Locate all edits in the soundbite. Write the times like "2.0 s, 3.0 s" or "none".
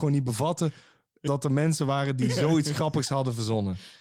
none